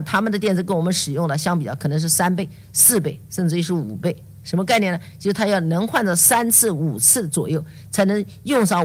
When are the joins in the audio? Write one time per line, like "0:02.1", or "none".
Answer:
none